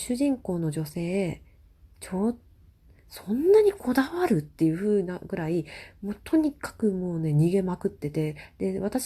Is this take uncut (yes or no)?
no